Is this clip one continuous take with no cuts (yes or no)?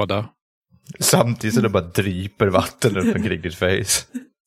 yes